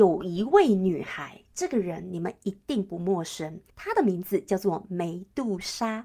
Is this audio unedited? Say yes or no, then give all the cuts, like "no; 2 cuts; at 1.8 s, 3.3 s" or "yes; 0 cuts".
no; 1 cut; at 3.7 s